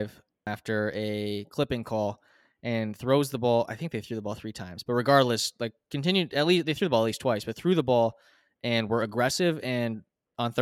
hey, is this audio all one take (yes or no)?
yes